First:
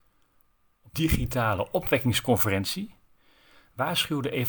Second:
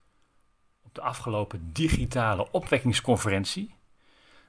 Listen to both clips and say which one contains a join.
first; 1 cut; at 0.9 s

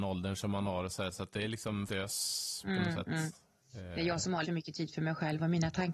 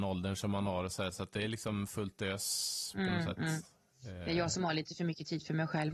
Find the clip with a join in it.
first; 2 cuts; at 1.9 s, 4.4 s

